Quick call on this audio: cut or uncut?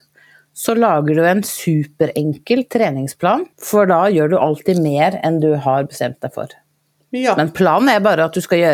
cut